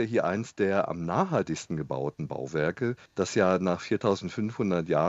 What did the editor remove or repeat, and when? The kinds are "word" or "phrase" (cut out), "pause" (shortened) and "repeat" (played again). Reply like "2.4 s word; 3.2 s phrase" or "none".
3.1 s pause